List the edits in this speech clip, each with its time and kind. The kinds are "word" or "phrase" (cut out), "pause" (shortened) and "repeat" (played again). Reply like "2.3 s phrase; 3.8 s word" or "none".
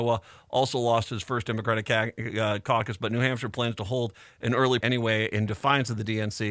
1.1 s phrase; 4.8 s word